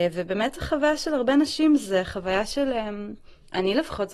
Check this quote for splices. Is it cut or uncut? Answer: uncut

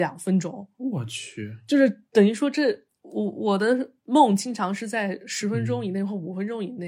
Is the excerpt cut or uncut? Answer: uncut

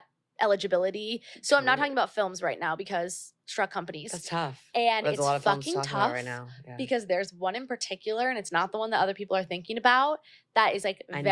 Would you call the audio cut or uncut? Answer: uncut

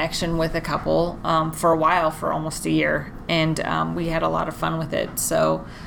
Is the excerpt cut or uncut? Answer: uncut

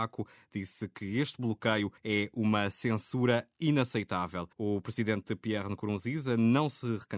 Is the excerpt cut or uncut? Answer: cut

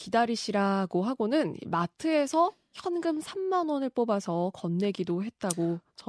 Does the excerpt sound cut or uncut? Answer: uncut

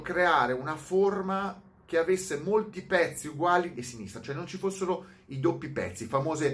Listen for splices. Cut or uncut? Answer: cut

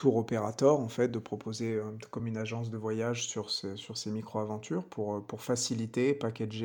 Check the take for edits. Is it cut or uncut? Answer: uncut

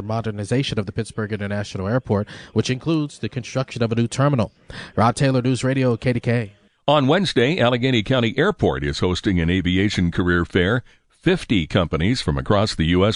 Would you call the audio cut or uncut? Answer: uncut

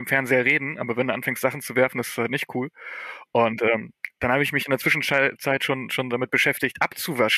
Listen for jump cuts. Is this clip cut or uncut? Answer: uncut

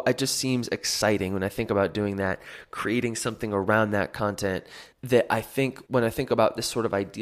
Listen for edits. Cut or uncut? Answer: cut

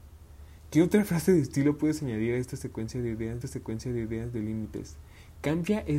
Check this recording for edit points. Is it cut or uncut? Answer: cut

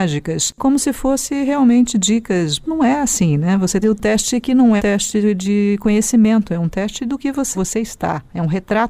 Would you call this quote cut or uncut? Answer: cut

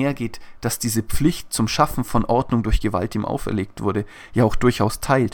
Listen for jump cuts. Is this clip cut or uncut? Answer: uncut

